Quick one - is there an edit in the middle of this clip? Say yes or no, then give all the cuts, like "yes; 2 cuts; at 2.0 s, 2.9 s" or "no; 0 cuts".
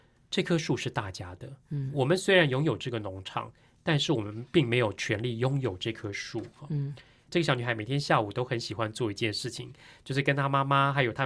no; 0 cuts